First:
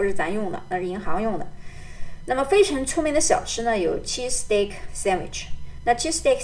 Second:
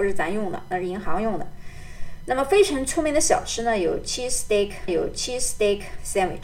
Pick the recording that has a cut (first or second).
second